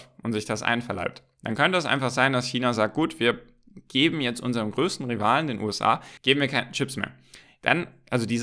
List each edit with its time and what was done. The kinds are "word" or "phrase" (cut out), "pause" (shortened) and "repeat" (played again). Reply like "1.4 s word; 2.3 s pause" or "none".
6.2 s pause